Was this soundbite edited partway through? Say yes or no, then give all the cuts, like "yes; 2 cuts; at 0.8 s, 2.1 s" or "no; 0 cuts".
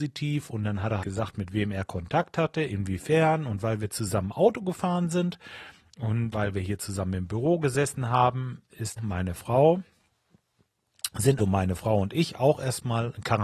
yes; 4 cuts; at 1.0 s, 6.3 s, 9.0 s, 11.4 s